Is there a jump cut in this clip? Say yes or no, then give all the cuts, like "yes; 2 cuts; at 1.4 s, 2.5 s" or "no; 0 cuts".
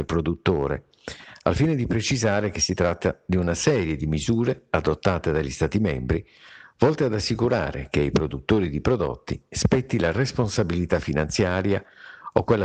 no; 0 cuts